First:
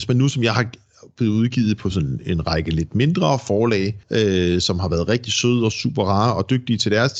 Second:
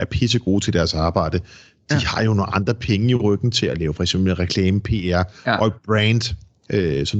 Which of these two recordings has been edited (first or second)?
first